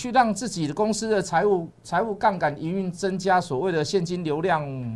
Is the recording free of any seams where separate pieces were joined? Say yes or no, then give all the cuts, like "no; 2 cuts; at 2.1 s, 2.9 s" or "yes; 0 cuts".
no; 1 cut; at 1.7 s